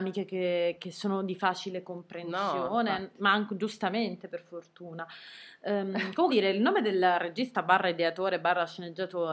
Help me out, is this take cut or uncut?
cut